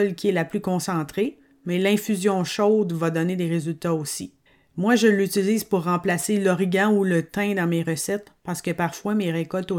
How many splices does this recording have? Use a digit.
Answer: 1